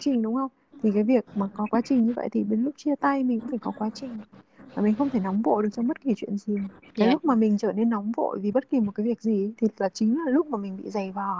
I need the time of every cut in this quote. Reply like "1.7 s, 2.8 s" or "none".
none